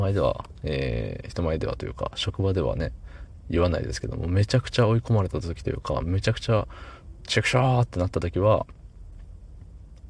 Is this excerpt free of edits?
no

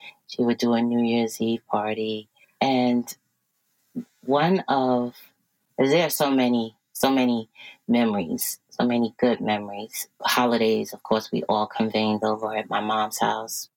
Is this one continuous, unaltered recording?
yes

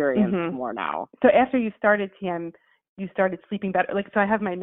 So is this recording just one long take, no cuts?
yes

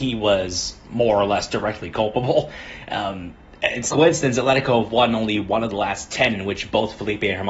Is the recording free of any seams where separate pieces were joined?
no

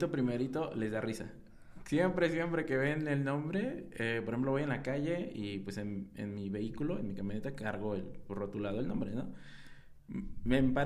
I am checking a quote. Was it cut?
no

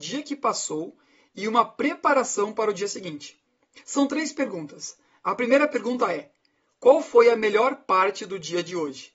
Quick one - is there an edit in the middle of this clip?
no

